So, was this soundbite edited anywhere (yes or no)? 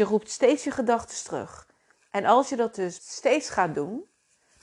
yes